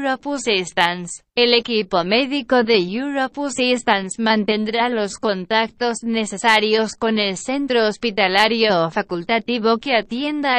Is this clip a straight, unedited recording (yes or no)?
no